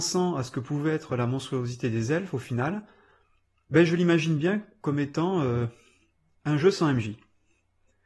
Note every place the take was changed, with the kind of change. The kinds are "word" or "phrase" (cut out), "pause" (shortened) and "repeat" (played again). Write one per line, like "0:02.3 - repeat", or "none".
none